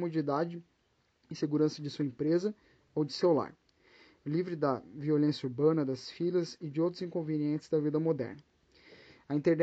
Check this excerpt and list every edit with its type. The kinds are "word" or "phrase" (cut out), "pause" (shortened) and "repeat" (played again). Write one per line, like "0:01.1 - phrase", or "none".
none